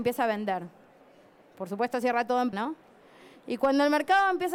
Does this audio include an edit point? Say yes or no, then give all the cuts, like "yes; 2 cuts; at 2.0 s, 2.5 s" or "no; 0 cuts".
yes; 1 cut; at 2.5 s